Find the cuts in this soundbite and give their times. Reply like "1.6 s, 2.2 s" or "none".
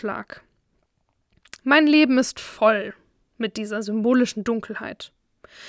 none

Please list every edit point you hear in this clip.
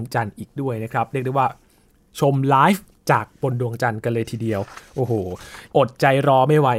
none

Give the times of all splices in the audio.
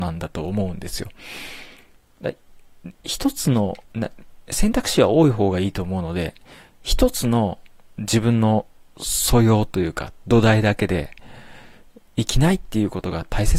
2.9 s, 3.8 s

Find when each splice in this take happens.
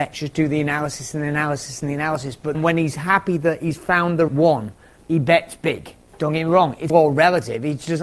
2.5 s, 4.3 s, 6.9 s

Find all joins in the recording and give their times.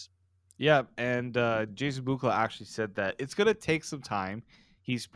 none

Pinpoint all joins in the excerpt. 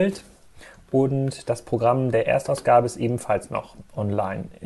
none

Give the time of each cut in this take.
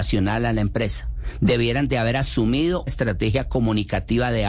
2.9 s

